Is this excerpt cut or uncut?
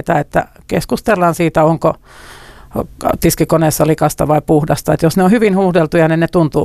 uncut